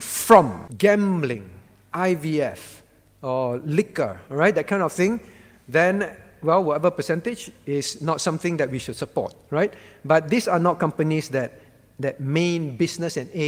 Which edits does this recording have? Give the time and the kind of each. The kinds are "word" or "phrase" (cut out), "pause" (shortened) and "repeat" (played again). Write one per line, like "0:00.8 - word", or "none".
none